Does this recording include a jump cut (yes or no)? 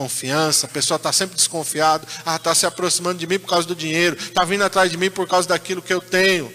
no